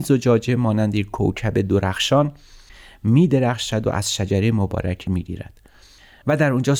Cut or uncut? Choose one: cut